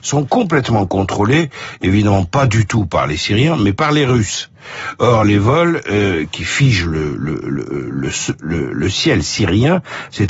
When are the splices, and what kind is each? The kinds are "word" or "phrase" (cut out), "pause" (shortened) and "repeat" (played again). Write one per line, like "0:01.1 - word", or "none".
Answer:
none